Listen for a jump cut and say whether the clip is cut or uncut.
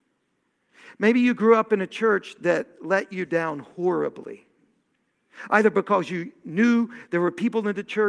uncut